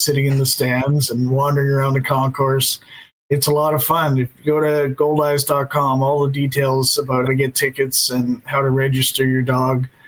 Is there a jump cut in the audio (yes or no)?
yes